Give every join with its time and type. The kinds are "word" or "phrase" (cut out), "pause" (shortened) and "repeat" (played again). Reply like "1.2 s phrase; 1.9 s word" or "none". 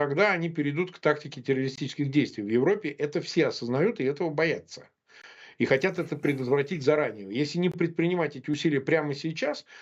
none